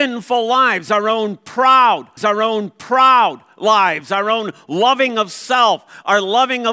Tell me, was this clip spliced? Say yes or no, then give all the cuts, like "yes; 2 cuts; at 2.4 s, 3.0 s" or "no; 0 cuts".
yes; 1 cut; at 2.2 s